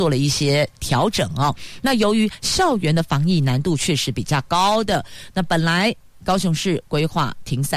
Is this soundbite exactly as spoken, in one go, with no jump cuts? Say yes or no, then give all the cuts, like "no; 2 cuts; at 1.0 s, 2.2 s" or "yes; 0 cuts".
yes; 0 cuts